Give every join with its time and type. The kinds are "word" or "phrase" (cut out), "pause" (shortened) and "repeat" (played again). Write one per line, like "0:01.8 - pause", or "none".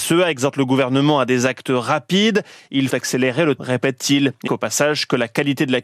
0:02.9 - word
0:03.6 - word
0:04.5 - word